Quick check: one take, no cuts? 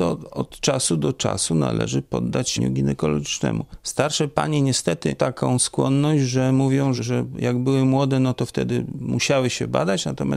no; 3 cuts; at 2.6 s, 5.2 s, 7.0 s

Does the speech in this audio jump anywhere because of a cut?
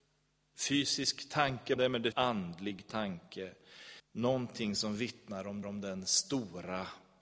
yes; 4 cuts; at 1.8 s, 2.1 s, 4.0 s, 5.6 s

